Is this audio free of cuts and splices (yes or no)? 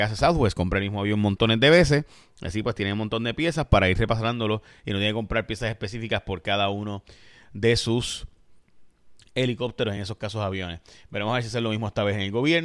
yes